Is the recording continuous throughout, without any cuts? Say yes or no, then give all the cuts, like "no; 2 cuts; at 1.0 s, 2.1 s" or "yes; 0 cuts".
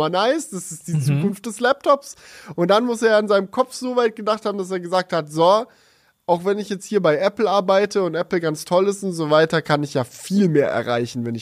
yes; 0 cuts